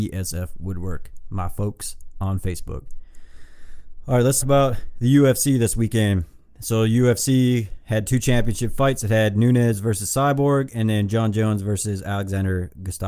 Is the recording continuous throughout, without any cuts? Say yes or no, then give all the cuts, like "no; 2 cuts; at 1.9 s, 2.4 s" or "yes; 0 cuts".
no; 1 cut; at 4.4 s